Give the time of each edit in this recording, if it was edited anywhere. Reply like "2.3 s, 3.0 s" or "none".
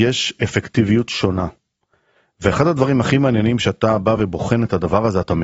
none